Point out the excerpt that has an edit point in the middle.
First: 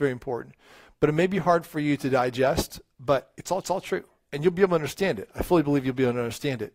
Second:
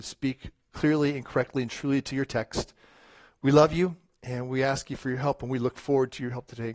first; 1 cut; at 3.6 s

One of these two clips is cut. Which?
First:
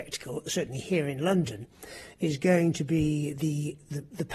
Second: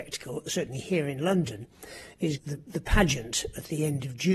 second; 1 cut; at 2.4 s

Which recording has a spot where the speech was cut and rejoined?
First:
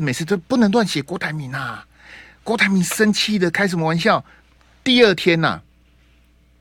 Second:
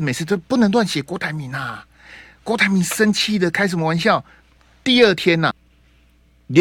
second; 1 cut; at 5.5 s

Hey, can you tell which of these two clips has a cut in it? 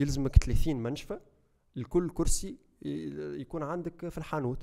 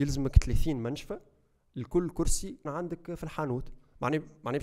second; 1 cut; at 2.7 s

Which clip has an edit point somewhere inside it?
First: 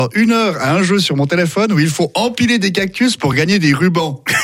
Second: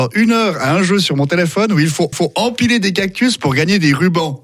second; 1 cut; at 2.1 s

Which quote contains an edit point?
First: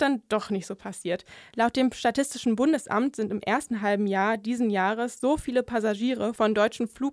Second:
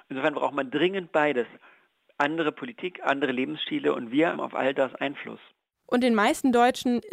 second; 1 cut; at 4.3 s

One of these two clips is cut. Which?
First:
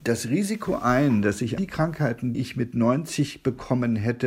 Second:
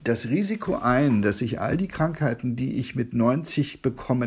first; 2 cuts; at 1.6 s, 2.3 s

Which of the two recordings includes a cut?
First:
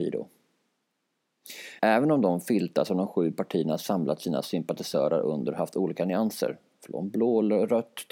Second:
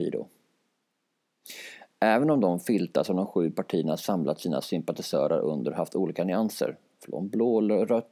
first; 1 cut; at 1.8 s

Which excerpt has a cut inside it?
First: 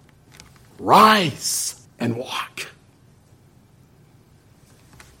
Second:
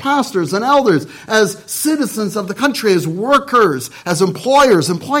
first; 1 cut; at 1.9 s

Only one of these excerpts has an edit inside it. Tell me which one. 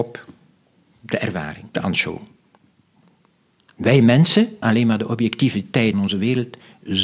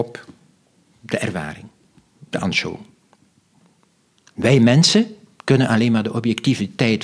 first; 3 cuts; at 1.7 s, 4.6 s, 5.9 s

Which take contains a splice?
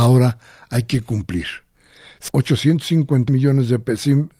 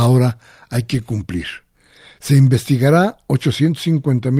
first; 2 cuts; at 2.3 s, 3.3 s

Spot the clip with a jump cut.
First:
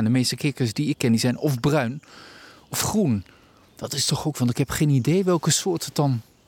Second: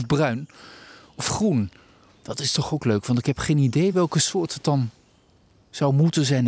first; 1 cut; at 4.3 s

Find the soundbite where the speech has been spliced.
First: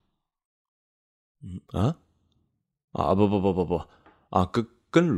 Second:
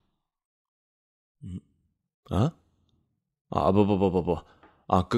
first; 1 cut; at 1.6 s

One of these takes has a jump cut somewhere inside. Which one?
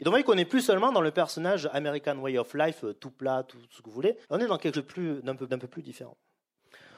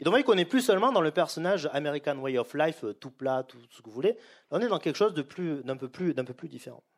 first; 3 cuts; at 4.2 s, 4.7 s, 5.5 s

